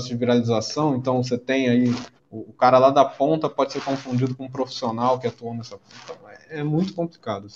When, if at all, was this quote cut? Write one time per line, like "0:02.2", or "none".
0:02.2